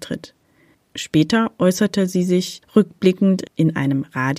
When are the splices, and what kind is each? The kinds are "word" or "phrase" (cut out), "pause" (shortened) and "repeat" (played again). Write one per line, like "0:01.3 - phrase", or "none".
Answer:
none